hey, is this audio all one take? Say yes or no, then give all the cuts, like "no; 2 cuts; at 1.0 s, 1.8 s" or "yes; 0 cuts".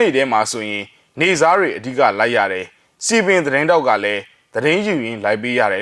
yes; 0 cuts